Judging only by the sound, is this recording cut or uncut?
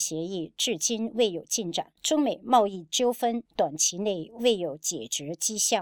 cut